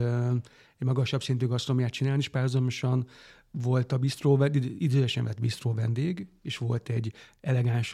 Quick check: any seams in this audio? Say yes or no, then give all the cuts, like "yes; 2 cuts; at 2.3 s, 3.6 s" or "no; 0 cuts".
no; 0 cuts